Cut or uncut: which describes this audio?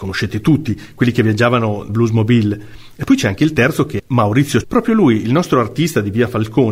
cut